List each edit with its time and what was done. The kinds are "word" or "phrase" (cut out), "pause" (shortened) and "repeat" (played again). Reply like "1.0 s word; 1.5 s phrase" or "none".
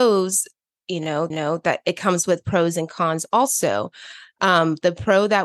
1.3 s repeat